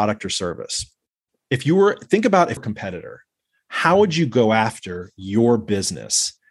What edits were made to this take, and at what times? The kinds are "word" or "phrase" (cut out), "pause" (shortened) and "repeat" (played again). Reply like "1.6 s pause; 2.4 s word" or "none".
2.6 s phrase